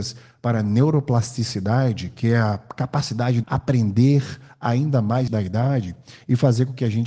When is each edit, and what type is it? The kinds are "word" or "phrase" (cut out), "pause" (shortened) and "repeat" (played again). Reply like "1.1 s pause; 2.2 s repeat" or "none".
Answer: 3.4 s phrase; 5.3 s word